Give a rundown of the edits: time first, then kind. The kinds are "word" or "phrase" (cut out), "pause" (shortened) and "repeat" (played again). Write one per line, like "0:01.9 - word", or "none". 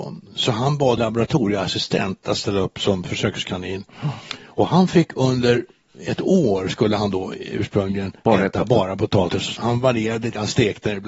0:01.0 - word
0:08.2 - pause
0:09.6 - word